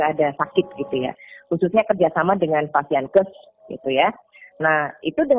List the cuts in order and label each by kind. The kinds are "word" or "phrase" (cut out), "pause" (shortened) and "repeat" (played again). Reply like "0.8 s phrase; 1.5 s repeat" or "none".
none